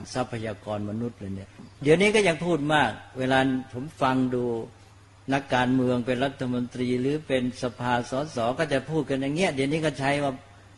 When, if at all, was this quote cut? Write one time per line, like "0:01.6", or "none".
0:01.7
0:04.9